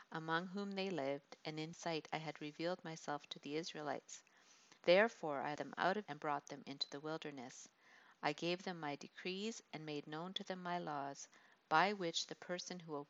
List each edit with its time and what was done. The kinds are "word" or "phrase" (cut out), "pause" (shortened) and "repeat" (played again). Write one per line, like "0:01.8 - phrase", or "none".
0:01.7 - word
0:04.8 - pause
0:05.6 - word
0:06.1 - word